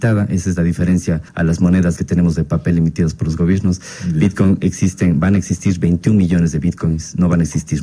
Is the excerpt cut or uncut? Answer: cut